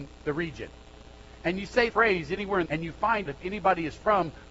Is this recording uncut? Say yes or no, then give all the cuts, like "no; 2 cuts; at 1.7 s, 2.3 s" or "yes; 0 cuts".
no; 3 cuts; at 1.9 s, 2.7 s, 3.3 s